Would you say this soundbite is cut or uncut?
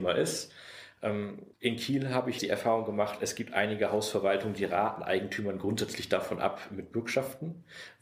cut